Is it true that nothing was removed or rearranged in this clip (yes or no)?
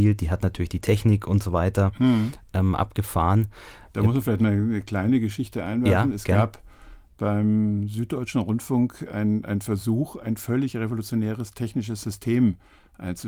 yes